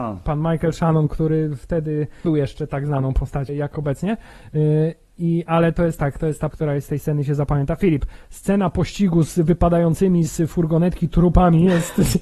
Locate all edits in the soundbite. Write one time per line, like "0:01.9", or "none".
0:02.2
0:03.5
0:06.5